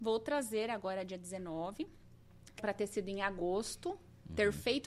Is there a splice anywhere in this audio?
yes; 1 cut; at 2.6 s

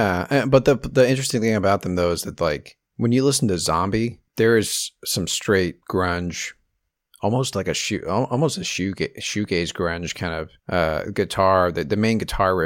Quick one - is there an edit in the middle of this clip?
yes; 4 cuts; at 2.9 s, 4.3 s, 5.8 s, 10.6 s

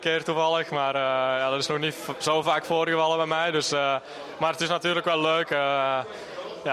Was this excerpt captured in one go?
yes; 0 cuts

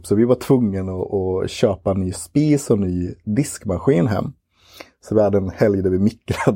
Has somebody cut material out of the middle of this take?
yes; 1 cut; at 1.1 s

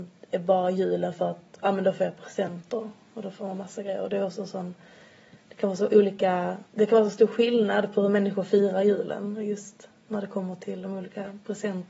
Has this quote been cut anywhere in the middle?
yes; 1 cut; at 6.7 s

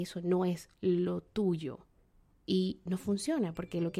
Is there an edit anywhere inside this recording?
no; 0 cuts

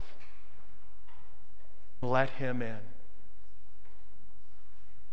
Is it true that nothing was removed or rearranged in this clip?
no; 1 cut; at 2.0 s

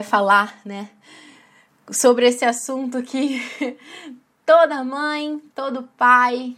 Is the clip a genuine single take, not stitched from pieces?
yes; 0 cuts

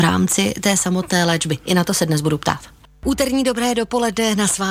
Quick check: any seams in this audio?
no; 0 cuts

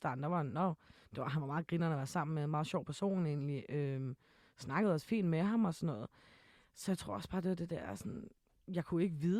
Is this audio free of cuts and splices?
yes; 0 cuts

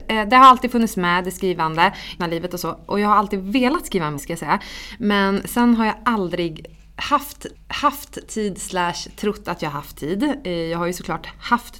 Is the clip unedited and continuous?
no; 3 cuts; at 2.2 s, 4.2 s, 7.5 s

